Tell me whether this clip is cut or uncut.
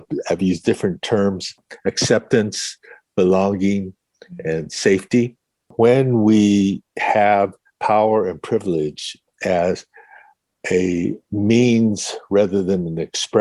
uncut